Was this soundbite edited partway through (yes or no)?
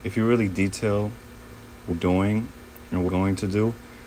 yes